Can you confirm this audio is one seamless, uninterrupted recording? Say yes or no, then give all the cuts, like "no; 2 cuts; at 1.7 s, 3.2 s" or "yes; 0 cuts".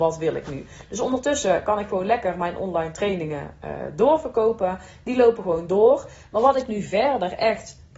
yes; 0 cuts